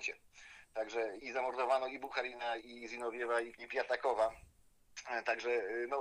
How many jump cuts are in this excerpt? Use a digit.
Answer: 3